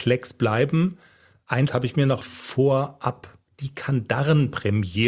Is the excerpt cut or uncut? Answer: cut